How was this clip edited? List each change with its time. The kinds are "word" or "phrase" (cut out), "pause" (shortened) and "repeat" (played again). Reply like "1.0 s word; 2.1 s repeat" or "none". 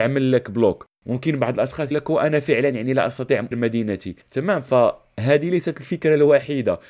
1.9 s word; 3.5 s word; 4.2 s pause